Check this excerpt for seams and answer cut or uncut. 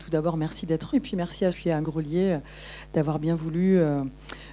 cut